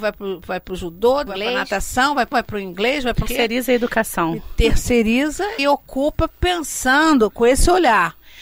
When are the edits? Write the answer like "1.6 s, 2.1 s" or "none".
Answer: 1.3 s, 2.3 s, 3.3 s, 5.6 s, 6.3 s